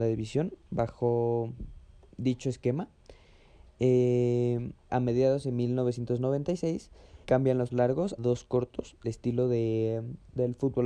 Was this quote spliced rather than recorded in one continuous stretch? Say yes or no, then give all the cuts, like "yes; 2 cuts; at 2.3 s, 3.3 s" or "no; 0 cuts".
yes; 6 cuts; at 2.1 s, 4.9 s, 7.2 s, 7.7 s, 8.2 s, 9.0 s